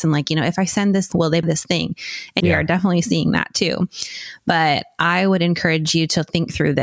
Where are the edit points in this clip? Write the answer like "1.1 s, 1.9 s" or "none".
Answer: 1.1 s, 1.4 s, 2.4 s